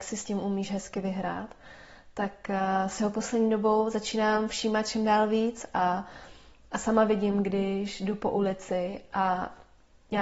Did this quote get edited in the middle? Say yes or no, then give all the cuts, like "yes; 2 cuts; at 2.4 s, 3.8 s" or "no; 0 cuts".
no; 0 cuts